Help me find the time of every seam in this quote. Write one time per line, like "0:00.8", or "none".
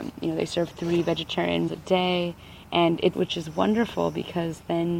0:01.7
0:03.1